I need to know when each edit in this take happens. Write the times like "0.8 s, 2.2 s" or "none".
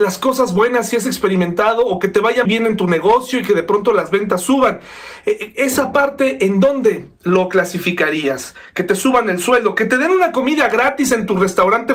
2.4 s